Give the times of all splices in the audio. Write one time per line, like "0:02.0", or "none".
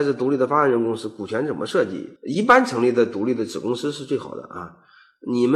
0:02.2